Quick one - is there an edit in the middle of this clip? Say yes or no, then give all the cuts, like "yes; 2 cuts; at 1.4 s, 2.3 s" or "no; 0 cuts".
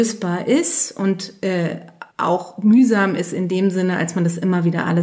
yes; 1 cut; at 2.1 s